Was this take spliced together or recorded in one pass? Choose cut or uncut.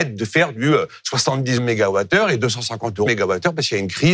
cut